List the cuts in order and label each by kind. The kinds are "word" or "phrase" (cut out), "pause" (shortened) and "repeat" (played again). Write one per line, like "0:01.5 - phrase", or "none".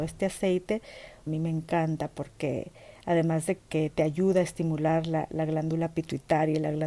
0:01.3 - phrase
0:03.6 - word